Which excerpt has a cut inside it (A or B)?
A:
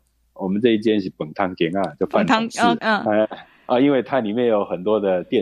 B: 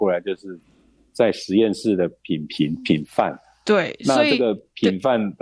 A